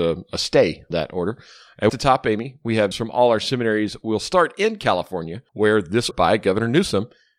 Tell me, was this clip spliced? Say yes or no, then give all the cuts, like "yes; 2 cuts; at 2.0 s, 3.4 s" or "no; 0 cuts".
yes; 5 cuts; at 0.9 s, 1.9 s, 2.9 s, 5.5 s, 6.1 s